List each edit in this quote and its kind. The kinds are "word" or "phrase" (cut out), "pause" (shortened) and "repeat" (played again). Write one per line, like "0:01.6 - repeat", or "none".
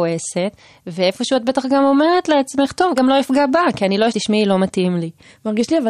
0:03.0 - phrase
0:04.1 - phrase